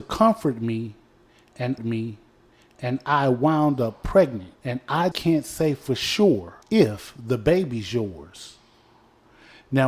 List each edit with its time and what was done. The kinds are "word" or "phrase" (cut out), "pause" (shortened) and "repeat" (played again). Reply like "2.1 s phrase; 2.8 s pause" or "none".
1.8 s repeat; 4.6 s pause; 5.1 s word; 6.6 s pause